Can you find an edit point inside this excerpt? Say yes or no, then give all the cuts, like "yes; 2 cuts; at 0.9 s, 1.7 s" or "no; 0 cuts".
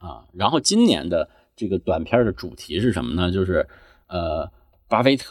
no; 0 cuts